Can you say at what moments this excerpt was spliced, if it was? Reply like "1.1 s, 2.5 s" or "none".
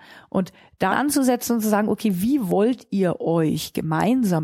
0.9 s

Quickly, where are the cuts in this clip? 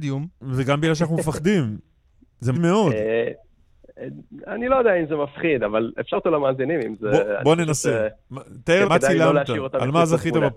2.5 s, 6.1 s, 8.8 s

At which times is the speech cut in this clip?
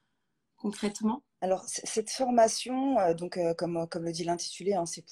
1.3 s

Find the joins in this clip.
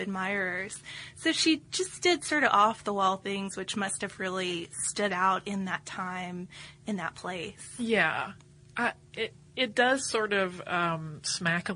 none

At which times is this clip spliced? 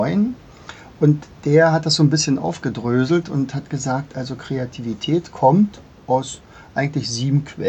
5.9 s

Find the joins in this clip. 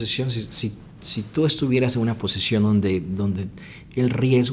none

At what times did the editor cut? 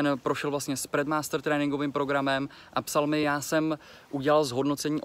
none

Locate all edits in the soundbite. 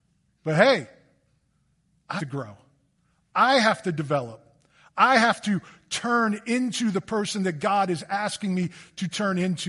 2.2 s

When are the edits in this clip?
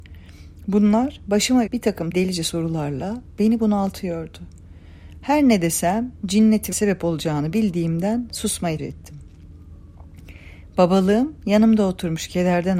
1.7 s, 2.1 s, 6.7 s, 8.8 s

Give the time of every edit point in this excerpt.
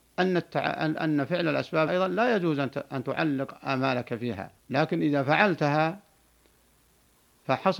1.9 s, 4.6 s

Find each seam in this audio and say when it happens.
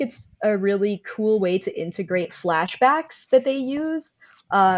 none

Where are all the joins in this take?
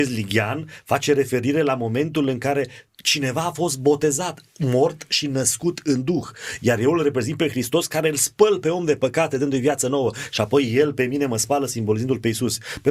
none

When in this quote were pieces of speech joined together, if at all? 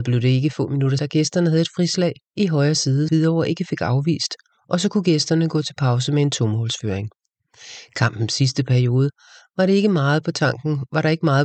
1.0 s, 3.1 s

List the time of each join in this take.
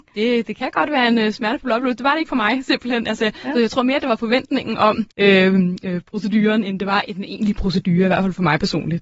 5.1 s

